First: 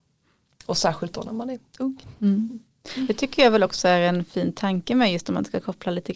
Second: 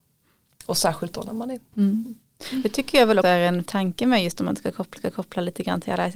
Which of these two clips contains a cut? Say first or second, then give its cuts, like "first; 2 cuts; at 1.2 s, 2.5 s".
second; 4 cuts; at 1.7 s, 3.2 s, 3.7 s, 5.0 s